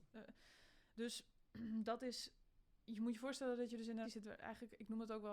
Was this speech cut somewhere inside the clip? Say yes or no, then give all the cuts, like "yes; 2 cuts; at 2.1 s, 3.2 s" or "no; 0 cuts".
yes; 1 cut; at 4.0 s